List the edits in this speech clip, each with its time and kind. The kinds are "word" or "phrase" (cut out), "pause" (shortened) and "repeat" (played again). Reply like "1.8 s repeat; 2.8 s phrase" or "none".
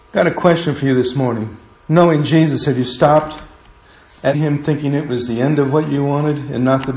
1.7 s pause; 4.3 s word